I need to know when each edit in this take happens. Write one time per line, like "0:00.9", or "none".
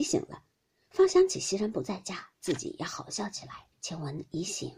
0:03.7